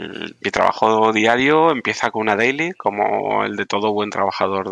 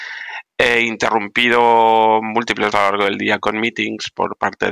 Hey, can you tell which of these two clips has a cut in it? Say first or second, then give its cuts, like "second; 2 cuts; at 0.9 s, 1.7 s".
second; 1 cut; at 2.7 s